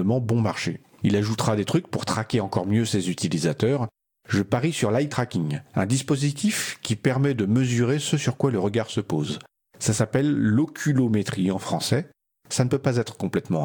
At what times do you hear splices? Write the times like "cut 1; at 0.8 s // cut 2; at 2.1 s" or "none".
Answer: none